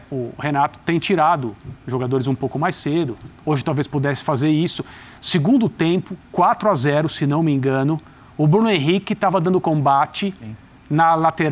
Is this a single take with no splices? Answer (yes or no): no